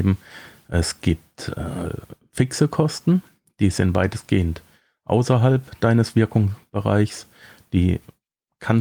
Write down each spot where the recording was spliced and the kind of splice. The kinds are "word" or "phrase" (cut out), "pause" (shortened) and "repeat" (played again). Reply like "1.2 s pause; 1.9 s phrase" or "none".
none